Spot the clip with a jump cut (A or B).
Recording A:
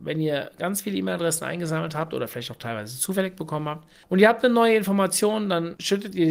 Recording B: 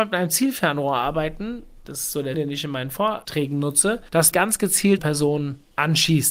B